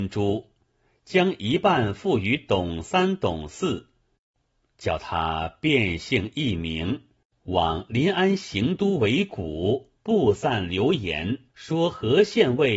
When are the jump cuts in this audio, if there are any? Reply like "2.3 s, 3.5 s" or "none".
10.0 s, 11.5 s